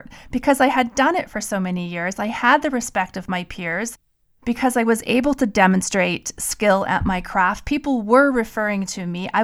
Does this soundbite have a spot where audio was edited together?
no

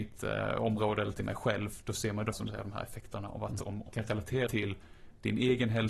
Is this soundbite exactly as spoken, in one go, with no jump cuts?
no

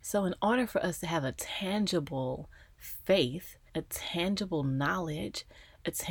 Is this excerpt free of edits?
no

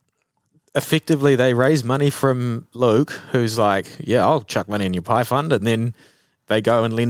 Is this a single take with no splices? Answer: yes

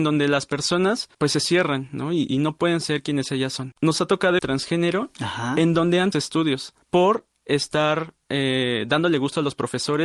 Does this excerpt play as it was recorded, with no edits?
no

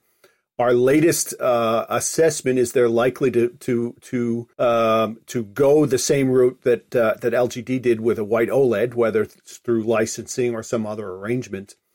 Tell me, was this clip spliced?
yes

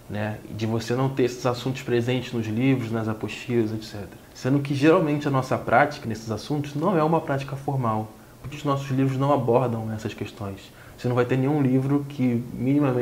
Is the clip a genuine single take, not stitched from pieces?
no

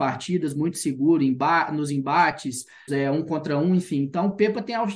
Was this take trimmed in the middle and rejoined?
yes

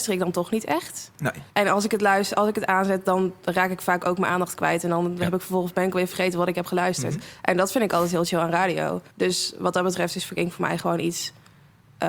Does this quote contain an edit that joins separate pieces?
yes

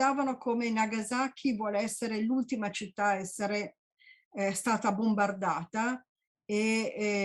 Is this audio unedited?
yes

